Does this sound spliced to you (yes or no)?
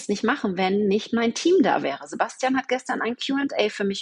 no